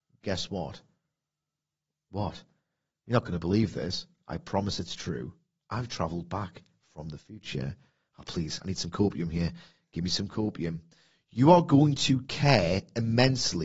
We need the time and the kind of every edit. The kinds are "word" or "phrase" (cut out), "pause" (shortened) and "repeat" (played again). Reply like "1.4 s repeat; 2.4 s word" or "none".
none